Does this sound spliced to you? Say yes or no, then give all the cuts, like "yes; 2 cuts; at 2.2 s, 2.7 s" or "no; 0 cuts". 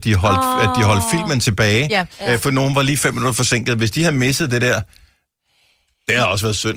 no; 0 cuts